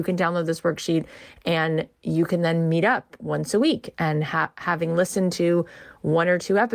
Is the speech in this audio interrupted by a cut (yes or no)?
no